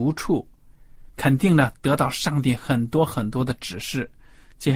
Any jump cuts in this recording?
yes; 1 cut; at 1.1 s

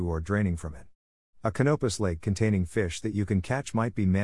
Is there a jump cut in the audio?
no; 0 cuts

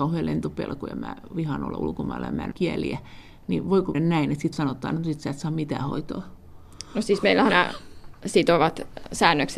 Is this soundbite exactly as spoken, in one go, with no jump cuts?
no; 4 cuts; at 2.5 s, 3.9 s, 4.5 s, 7.5 s

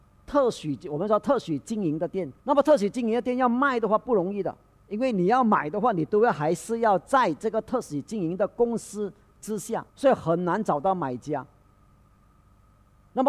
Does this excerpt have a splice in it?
yes; 2 cuts; at 2.4 s, 9.9 s

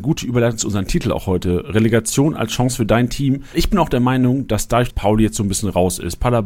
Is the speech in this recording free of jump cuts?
no; 2 cuts; at 3.5 s, 4.9 s

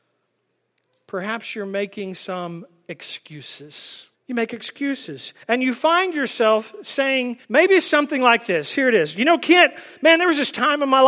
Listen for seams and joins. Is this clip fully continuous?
no; 3 cuts; at 4.1 s, 5.4 s, 7.4 s

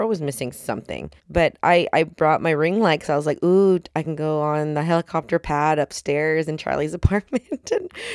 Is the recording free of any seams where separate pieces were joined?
no; 1 cut; at 1.2 s

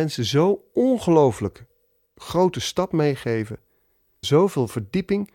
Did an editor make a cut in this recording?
yes; 1 cut; at 4.2 s

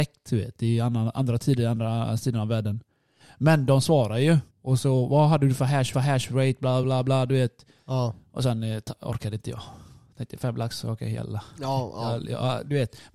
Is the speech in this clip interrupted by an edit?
yes; 3 cuts; at 4.5 s, 5.9 s, 6.8 s

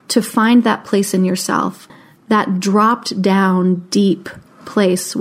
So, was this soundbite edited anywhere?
no; 0 cuts

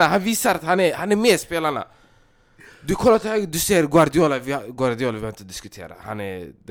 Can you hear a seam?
no; 0 cuts

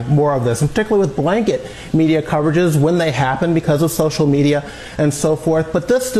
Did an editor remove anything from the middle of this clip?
no; 0 cuts

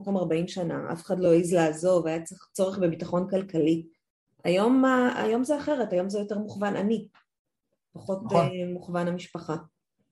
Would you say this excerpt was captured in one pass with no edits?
yes; 0 cuts

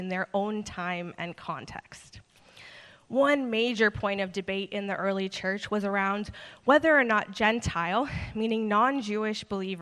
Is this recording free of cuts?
yes; 0 cuts

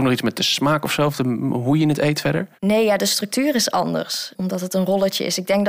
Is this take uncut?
no; 1 cut; at 2.5 s

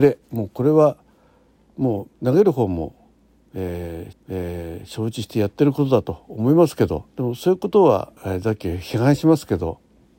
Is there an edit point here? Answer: yes; 4 cuts; at 2.1 s, 4.1 s, 7.1 s, 8.2 s

